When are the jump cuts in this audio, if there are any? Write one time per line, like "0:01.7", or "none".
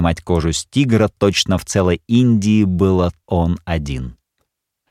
0:03.2